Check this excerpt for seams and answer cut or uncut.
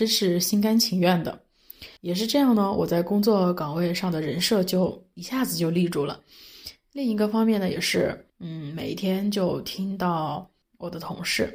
cut